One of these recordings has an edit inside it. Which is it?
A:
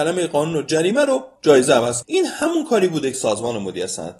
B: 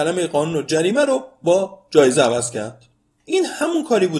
A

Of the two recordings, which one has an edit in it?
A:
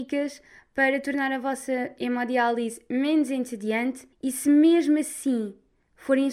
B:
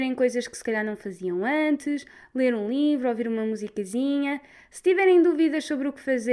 A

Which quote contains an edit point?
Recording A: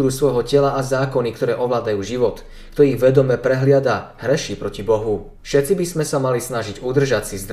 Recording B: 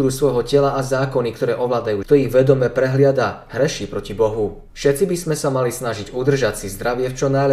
B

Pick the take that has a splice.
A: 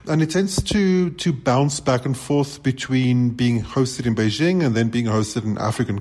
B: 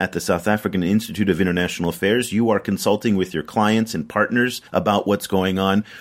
B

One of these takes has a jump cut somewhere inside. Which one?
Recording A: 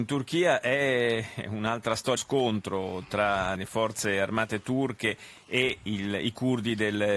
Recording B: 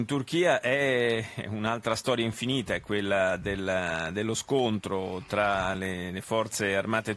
A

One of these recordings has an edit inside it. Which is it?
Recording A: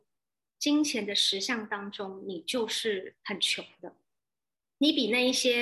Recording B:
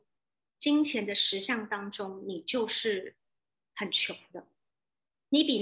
A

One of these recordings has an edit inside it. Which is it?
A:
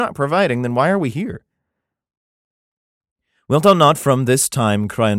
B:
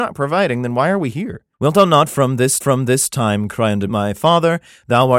B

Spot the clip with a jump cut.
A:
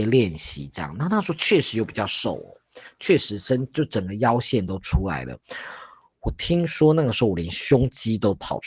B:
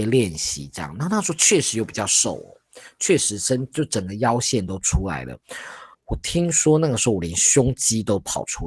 B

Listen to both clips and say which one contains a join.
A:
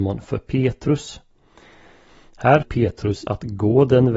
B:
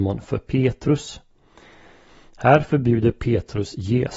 A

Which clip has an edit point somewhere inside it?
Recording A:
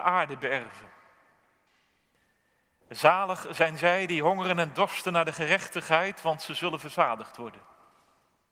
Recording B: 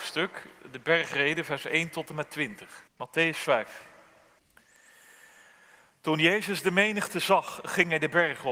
B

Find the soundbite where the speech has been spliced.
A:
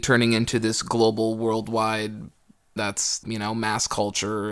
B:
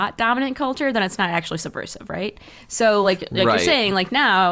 A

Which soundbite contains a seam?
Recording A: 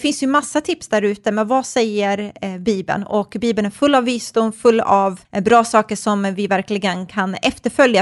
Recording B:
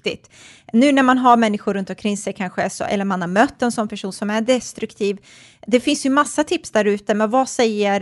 A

